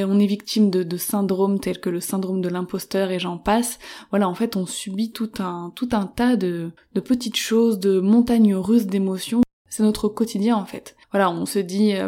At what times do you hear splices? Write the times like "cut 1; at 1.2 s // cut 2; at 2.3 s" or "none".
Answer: cut 1; at 6.8 s // cut 2; at 11.0 s